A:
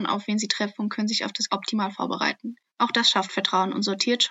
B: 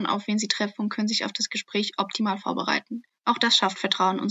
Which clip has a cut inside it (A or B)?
A